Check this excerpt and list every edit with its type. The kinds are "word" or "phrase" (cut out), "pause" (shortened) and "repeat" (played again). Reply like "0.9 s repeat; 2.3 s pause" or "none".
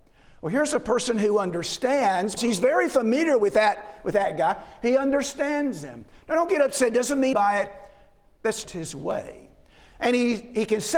2.4 s word; 7.3 s word; 8.6 s word